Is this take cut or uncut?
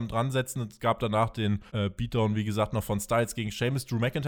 cut